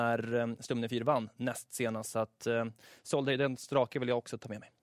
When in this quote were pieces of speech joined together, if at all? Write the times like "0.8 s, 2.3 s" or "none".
none